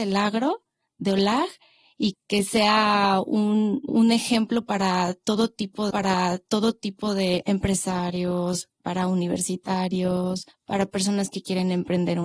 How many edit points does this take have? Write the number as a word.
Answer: five